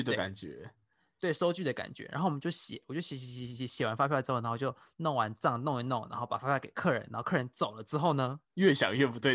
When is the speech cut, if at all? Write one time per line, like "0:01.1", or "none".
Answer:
0:08.4